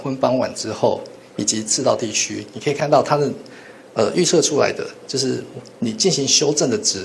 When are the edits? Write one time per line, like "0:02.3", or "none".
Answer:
0:05.8